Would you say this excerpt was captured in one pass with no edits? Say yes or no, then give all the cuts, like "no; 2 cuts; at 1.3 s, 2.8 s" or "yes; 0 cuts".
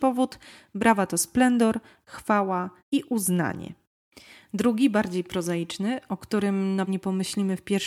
no; 2 cuts; at 2.8 s, 6.9 s